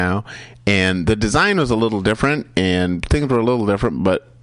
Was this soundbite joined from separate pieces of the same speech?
no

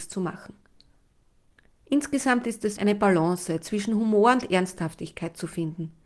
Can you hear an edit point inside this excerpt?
yes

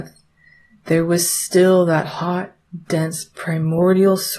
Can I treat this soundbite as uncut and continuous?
yes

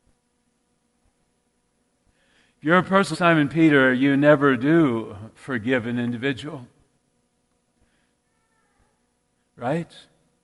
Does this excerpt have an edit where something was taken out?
yes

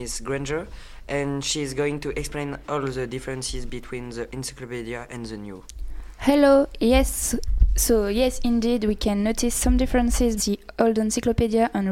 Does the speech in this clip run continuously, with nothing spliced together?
no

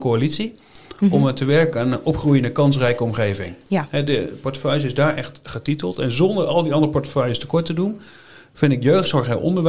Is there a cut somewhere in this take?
no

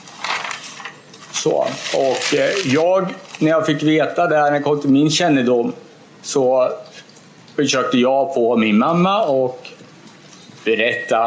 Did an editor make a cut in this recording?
no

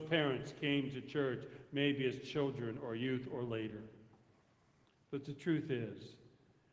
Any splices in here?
no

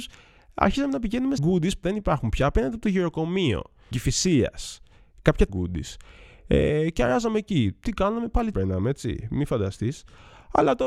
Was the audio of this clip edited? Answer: yes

